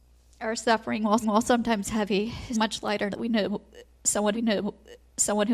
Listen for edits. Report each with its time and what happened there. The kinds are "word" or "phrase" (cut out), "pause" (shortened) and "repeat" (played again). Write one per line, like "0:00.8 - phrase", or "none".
0:01.2 - repeat
0:02.5 - word
0:03.1 - word
0:04.3 - repeat